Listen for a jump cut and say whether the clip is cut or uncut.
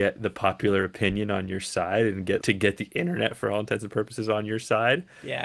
cut